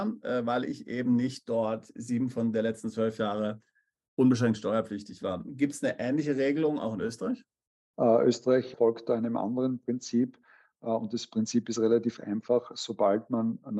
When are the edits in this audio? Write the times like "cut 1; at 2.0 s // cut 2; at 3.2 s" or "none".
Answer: none

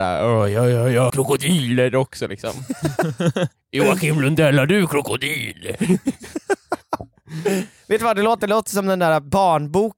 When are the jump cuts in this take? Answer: cut 1; at 1.1 s

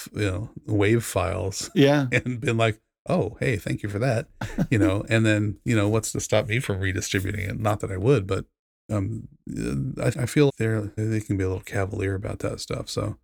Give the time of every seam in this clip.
cut 1; at 10.1 s // cut 2; at 10.5 s // cut 3; at 11.0 s

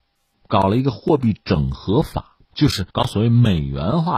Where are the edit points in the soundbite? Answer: cut 1; at 2.4 s // cut 2; at 2.9 s

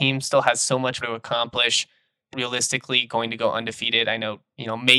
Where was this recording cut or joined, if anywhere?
cut 1; at 1.0 s // cut 2; at 2.3 s

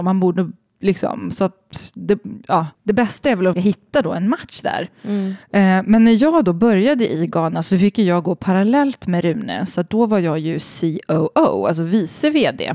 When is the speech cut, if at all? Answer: cut 1; at 2.7 s // cut 2; at 3.5 s // cut 3; at 5.4 s

